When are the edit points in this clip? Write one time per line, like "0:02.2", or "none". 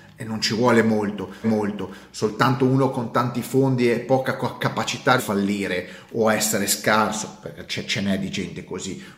0:01.4
0:05.2

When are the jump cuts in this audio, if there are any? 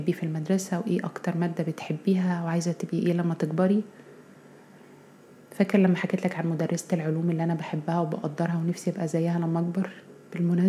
none

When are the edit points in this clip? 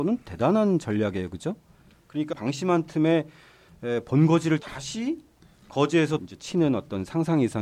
0:02.3
0:04.6
0:06.2

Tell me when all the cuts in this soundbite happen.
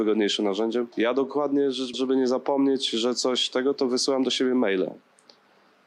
0:00.9
0:01.9

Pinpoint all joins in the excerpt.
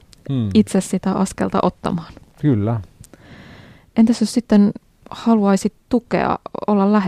none

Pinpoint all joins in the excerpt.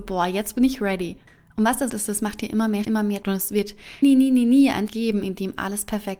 0:01.9
0:02.8
0:03.2
0:04.0
0:04.9

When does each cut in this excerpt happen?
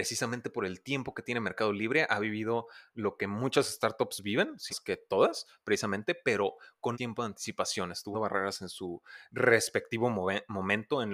0:04.7
0:06.9
0:08.1

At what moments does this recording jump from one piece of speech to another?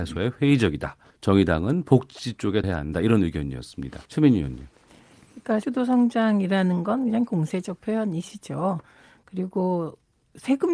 0:01.1
0:02.6
0:04.0
0:05.6
0:07.3

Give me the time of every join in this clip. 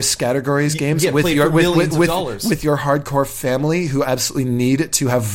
none

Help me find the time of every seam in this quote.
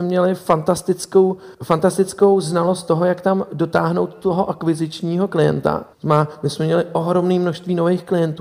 0:01.5
0:05.9

